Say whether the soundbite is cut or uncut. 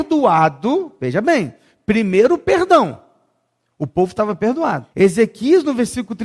cut